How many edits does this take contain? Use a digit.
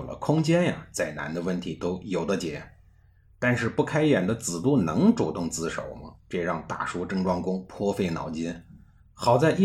0